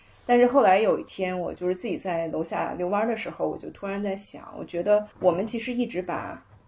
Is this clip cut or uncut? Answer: cut